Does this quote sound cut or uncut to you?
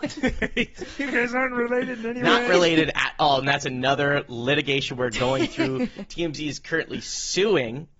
uncut